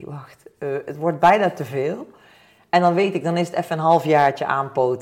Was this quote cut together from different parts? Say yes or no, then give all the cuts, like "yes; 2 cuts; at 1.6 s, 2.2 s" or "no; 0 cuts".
no; 0 cuts